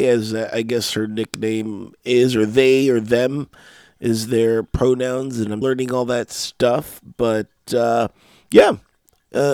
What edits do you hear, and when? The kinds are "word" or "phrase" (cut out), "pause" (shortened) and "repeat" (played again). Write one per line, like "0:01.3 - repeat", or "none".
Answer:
0:05.6 - word